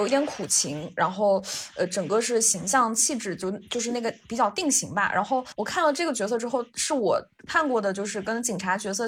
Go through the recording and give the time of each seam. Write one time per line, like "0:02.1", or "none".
0:05.5